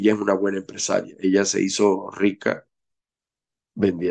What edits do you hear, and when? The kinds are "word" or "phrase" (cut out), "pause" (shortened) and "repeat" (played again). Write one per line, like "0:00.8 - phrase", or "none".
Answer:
none